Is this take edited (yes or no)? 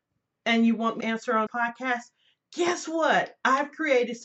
yes